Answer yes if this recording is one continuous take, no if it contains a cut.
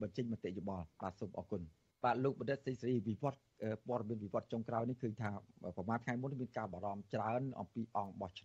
no